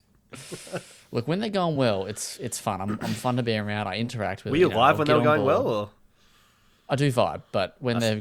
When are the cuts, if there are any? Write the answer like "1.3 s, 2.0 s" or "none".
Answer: none

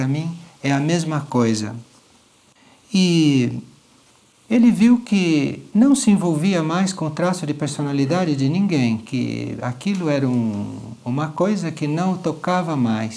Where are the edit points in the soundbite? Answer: none

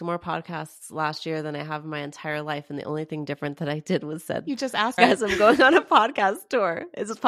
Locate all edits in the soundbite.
5.0 s

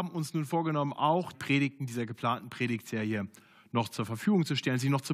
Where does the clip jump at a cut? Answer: 1.3 s

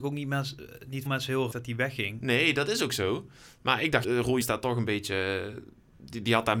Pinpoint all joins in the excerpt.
1.1 s, 1.5 s, 4.0 s, 4.4 s

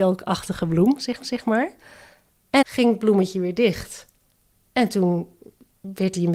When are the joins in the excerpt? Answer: 1.2 s, 2.6 s

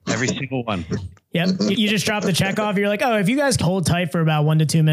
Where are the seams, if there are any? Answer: 1.7 s, 3.6 s

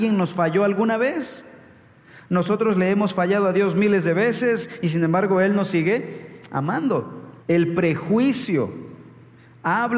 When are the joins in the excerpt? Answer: 7.4 s

